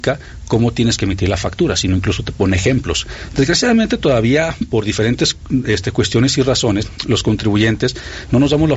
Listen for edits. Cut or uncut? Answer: uncut